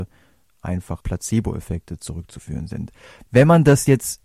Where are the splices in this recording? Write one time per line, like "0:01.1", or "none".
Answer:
0:01.0